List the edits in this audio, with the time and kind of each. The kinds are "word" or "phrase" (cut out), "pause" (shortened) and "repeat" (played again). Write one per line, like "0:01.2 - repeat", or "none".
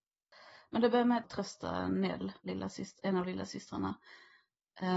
0:01.2 - phrase
0:02.4 - pause